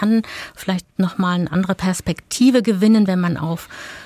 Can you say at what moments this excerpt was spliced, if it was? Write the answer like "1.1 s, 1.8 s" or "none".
none